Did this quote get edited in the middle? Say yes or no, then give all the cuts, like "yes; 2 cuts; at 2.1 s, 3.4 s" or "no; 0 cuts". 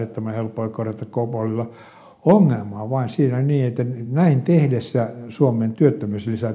no; 0 cuts